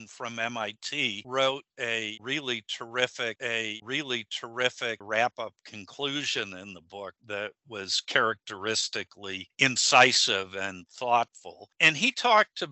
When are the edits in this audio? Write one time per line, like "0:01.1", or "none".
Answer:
0:03.4
0:07.2